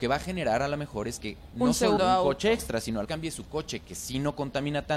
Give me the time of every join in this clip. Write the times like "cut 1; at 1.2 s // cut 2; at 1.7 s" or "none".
cut 1; at 1.5 s // cut 2; at 2.0 s // cut 3; at 3.0 s